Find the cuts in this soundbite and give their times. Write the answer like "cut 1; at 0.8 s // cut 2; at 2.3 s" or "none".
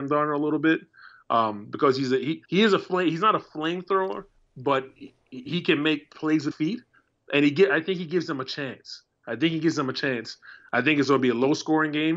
cut 1; at 2.4 s // cut 2; at 6.5 s